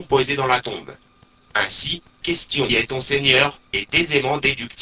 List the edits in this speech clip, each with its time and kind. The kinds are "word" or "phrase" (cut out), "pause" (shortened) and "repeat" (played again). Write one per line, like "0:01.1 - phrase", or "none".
0:02.2 - word
0:02.7 - phrase
0:03.7 - pause